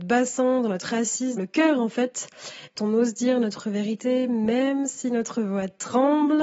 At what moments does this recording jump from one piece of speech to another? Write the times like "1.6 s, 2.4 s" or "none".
1.4 s, 2.8 s